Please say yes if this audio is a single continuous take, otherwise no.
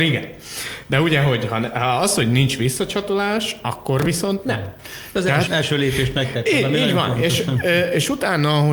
no